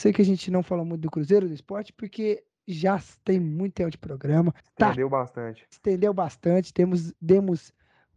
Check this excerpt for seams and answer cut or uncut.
cut